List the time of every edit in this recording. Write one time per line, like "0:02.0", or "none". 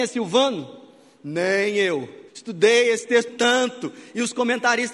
0:02.3
0:03.3